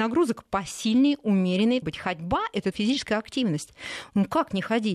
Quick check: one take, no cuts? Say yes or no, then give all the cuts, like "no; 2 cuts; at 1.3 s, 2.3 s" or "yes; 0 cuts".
no; 2 cuts; at 1.8 s, 2.7 s